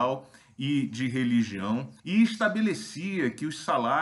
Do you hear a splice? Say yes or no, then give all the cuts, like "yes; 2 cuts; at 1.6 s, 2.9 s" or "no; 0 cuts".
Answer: yes; 1 cut; at 2.0 s